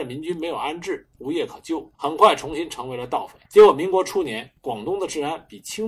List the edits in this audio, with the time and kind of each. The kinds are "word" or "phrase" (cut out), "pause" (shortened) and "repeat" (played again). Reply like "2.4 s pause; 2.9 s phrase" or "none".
1.2 s phrase; 1.9 s pause; 3.5 s pause